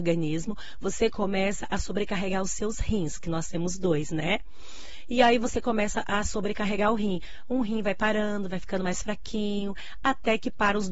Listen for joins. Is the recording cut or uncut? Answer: uncut